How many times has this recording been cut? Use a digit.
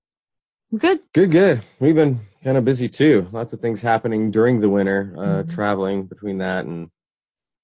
1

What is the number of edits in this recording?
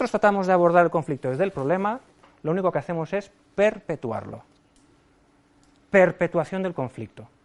0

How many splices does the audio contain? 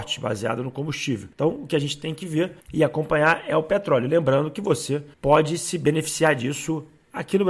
3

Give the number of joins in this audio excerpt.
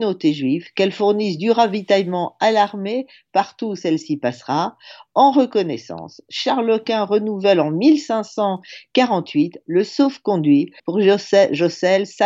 1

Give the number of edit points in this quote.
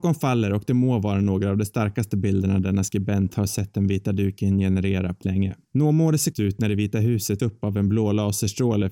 4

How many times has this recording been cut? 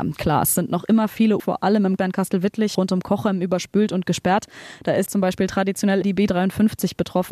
5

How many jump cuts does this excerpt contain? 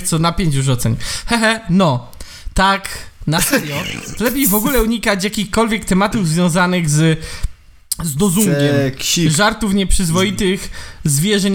0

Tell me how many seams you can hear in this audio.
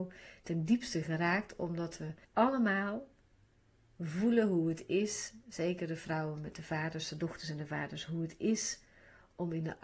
1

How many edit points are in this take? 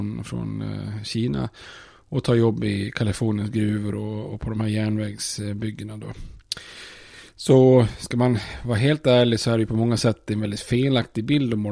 0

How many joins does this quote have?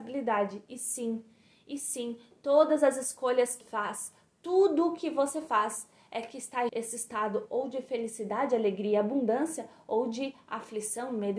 2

